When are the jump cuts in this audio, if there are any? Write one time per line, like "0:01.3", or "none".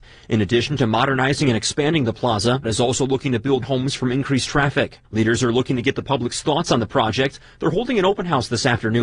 0:02.6
0:03.6
0:05.0